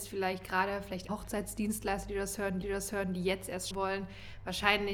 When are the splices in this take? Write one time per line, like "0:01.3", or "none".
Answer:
0:01.1
0:02.6
0:03.7